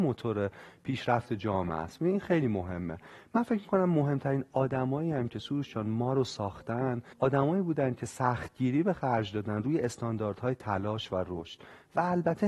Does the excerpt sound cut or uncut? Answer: cut